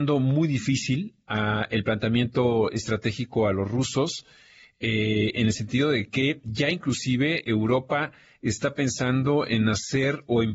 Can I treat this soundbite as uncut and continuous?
yes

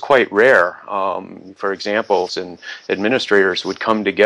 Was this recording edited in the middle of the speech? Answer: yes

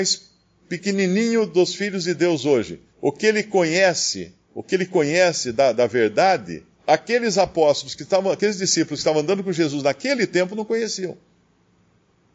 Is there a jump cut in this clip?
yes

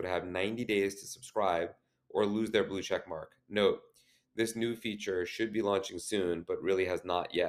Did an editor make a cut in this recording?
no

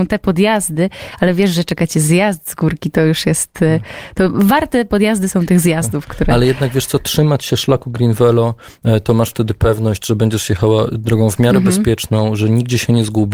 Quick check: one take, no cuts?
yes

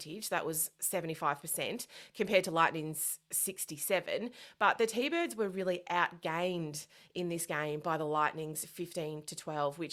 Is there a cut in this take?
no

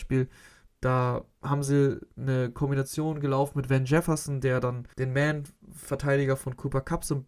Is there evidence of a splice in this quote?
yes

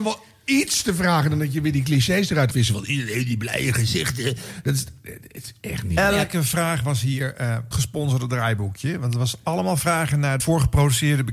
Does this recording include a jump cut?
yes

